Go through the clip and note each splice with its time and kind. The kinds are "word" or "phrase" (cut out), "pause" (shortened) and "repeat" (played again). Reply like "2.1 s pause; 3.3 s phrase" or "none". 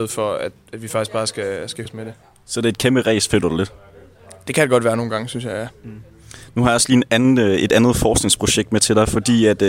1.9 s word